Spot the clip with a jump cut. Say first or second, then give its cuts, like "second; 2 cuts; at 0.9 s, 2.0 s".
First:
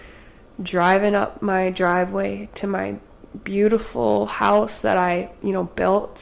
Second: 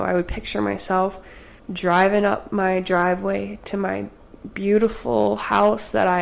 second; 1 cut; at 1.6 s